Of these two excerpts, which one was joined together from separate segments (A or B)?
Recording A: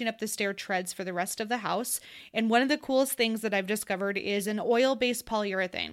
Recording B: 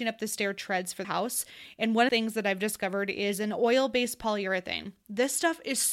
B